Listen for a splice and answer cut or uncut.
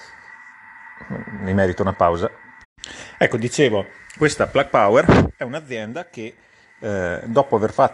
uncut